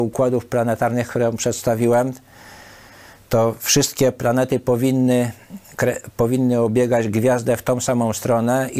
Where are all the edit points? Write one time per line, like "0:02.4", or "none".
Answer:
none